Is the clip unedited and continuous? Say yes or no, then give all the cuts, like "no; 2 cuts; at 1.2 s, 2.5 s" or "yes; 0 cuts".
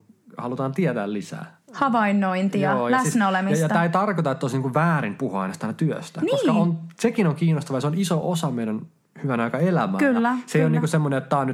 yes; 0 cuts